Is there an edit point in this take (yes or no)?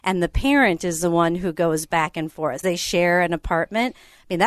yes